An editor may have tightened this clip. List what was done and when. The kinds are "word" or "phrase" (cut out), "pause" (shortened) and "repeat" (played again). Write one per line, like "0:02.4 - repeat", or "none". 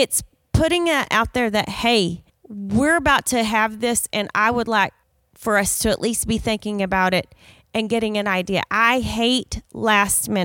0:02.3 - pause
0:05.0 - pause